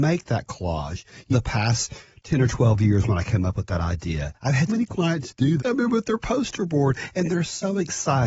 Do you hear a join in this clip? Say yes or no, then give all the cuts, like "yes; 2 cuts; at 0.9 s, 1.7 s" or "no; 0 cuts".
yes; 3 cuts; at 1.3 s, 4.7 s, 5.6 s